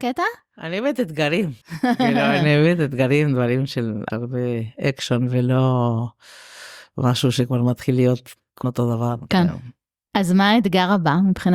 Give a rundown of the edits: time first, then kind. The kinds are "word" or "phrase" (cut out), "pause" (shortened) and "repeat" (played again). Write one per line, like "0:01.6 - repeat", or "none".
0:01.6 - pause
0:04.1 - phrase
0:08.6 - word